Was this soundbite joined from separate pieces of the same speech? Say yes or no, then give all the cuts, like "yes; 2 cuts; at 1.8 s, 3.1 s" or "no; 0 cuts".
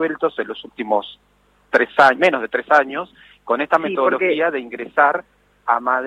no; 0 cuts